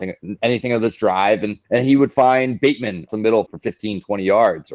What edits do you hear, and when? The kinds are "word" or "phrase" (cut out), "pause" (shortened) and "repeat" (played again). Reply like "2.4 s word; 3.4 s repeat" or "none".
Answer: 1.6 s pause; 3.1 s word; 3.5 s word